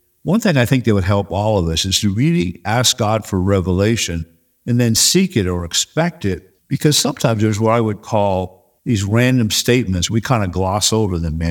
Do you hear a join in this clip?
yes; 2 cuts; at 6.6 s, 8.8 s

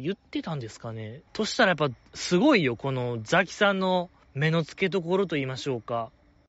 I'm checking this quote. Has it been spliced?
yes; 3 cuts; at 1.3 s, 2.1 s, 4.2 s

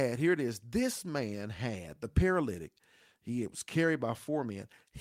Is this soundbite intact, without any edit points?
yes; 0 cuts

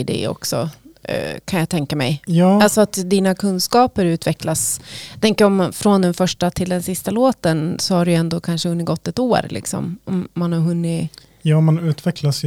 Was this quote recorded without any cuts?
yes; 0 cuts

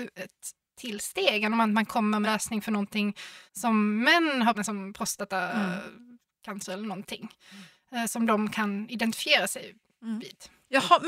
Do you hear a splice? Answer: yes; 3 cuts; at 2.2 s, 3.5 s, 4.5 s

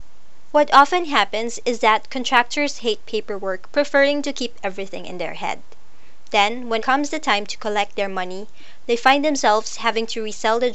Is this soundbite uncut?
no; 1 cut; at 6.8 s

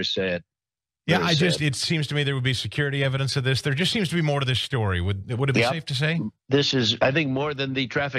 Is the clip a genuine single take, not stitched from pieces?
no; 1 cut; at 6.4 s

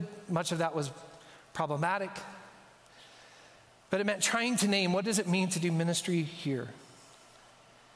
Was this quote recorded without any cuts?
yes; 0 cuts

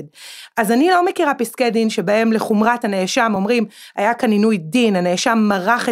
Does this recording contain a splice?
no; 0 cuts

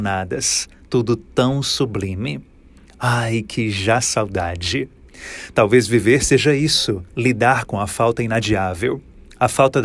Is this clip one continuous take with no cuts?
yes; 0 cuts

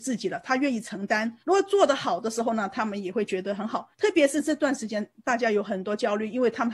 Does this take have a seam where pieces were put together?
yes; 2 cuts; at 1.4 s, 3.9 s

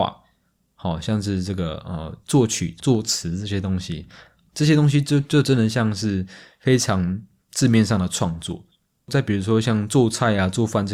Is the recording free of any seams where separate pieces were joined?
no; 1 cut; at 2.8 s

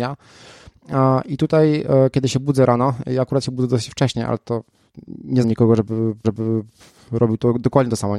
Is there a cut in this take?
yes; 2 cuts; at 5.4 s, 6.2 s

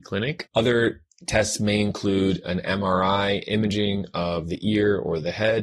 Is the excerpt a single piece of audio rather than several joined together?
yes; 0 cuts

